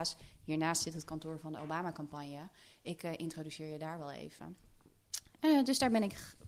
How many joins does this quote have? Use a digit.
0